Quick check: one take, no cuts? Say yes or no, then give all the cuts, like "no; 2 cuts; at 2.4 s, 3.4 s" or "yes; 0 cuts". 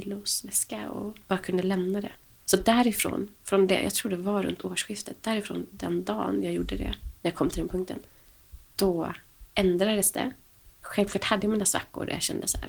no; 4 cuts; at 1.2 s, 2.2 s, 8.6 s, 10.7 s